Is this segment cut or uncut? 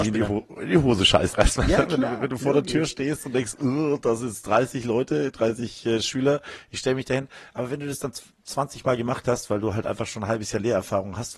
cut